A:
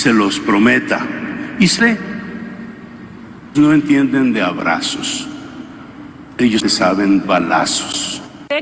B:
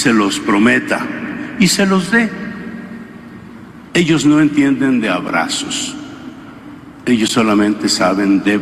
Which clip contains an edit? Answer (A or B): A